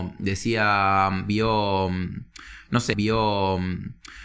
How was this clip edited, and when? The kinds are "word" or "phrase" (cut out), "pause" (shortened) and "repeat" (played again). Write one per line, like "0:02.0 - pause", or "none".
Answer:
0:02.9 - repeat